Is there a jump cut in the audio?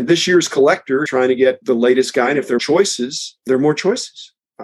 yes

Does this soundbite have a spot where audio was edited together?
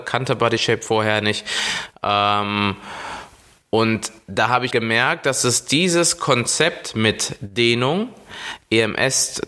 yes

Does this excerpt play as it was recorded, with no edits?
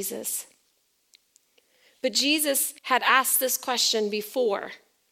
no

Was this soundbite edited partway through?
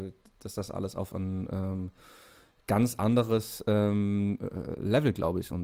no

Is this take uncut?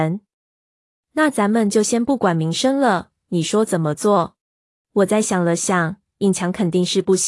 no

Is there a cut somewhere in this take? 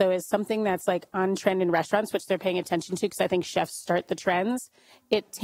no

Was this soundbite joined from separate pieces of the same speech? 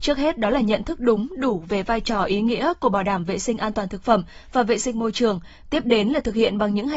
no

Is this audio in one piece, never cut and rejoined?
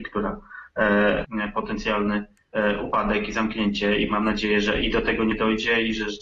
no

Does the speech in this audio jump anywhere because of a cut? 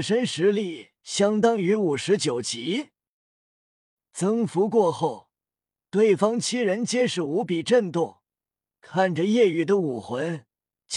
yes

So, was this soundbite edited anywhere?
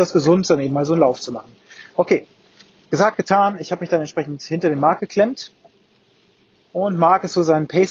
no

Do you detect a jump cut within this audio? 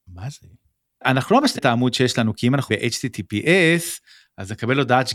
yes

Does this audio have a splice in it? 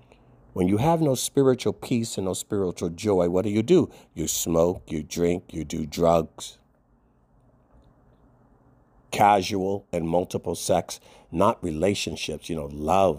no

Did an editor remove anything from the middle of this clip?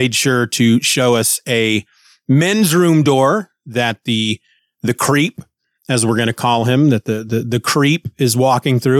no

